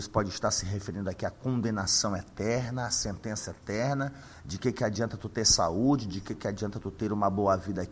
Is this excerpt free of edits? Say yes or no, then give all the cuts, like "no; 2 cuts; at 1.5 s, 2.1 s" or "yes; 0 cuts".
yes; 0 cuts